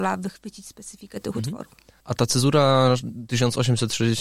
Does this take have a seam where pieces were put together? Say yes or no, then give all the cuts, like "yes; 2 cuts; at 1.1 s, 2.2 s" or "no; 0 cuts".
no; 0 cuts